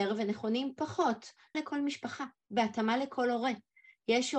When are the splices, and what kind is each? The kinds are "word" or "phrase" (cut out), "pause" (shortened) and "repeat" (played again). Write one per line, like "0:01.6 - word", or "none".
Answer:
0:01.5 - word